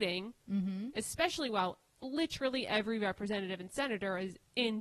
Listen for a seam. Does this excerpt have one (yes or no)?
no